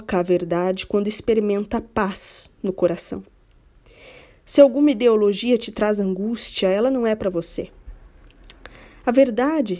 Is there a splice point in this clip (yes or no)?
no